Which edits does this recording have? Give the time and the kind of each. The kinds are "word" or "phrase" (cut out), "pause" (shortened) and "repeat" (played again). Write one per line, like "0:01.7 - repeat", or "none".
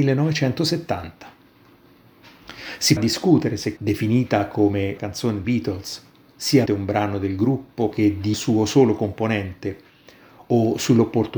0:03.0 - word
0:03.8 - word
0:05.0 - word
0:05.4 - word
0:06.7 - word
0:07.9 - word
0:08.3 - word